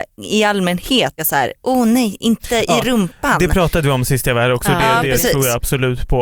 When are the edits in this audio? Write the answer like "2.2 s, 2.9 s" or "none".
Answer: 1.2 s